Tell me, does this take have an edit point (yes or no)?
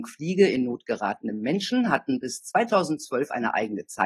no